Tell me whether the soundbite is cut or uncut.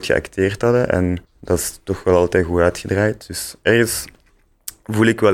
cut